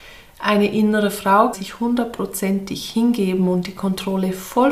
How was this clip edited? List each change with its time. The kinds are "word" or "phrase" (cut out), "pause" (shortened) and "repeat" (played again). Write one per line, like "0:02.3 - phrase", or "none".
0:01.5 - word